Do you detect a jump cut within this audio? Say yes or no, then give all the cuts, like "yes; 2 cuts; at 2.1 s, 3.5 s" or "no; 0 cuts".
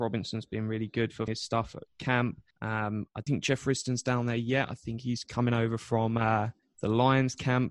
yes; 4 cuts; at 1.3 s, 2.5 s, 3.3 s, 6.6 s